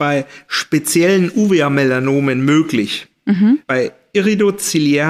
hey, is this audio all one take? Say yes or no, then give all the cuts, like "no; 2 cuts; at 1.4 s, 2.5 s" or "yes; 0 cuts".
no; 1 cut; at 3.6 s